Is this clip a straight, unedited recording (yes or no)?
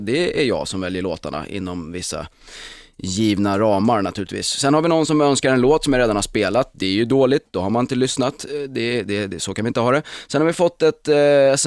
yes